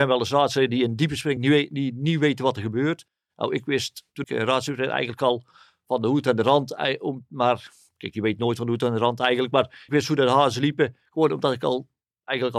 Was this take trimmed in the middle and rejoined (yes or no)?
yes